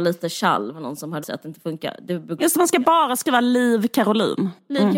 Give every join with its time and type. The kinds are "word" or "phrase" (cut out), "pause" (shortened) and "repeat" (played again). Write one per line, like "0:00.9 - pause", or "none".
0:01.2 - word
0:02.4 - word